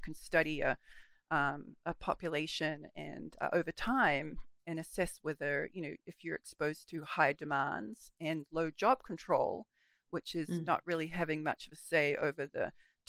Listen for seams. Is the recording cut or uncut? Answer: uncut